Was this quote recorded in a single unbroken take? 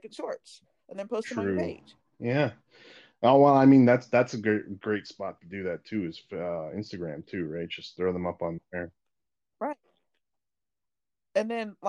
yes; 0 cuts

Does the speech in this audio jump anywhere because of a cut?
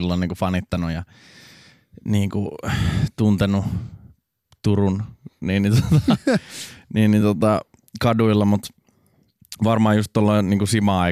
no; 0 cuts

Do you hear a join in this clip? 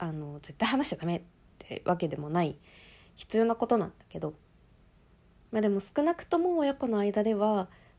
no; 0 cuts

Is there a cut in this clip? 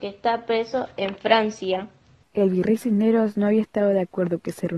no; 0 cuts

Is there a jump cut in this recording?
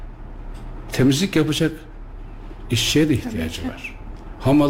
no; 0 cuts

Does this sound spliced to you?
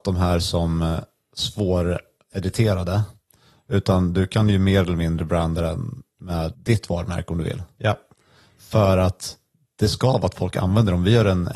yes; 1 cut; at 6.5 s

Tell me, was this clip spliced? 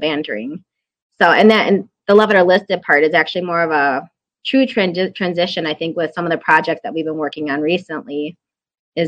no; 0 cuts

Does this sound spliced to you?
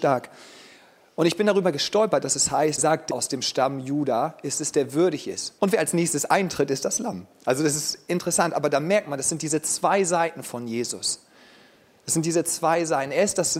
yes; 3 cuts; at 2.8 s, 3.1 s, 5.6 s

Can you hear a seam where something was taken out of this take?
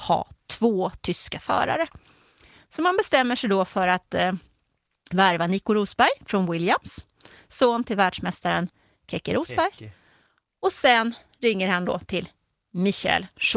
no; 0 cuts

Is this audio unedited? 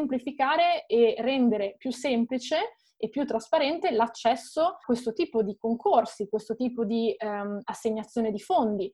no; 1 cut; at 4.8 s

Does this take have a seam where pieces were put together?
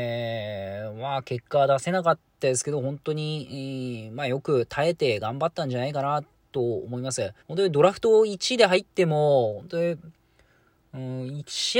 yes; 1 cut; at 7.4 s

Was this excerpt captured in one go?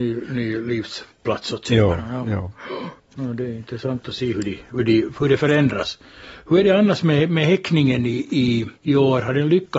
no; 2 cuts; at 3.0 s, 8.8 s

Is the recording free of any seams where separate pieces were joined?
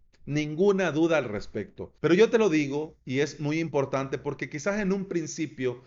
no; 1 cut; at 2.0 s

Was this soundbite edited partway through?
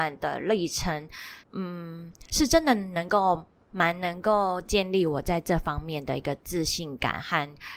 yes; 1 cut; at 1.4 s

